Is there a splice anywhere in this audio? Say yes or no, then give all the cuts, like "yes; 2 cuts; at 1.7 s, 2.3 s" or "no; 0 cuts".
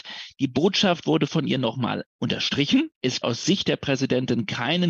yes; 1 cut; at 3.2 s